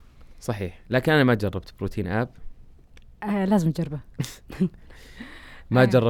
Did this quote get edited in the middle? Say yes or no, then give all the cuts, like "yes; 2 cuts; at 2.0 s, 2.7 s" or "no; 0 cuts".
no; 0 cuts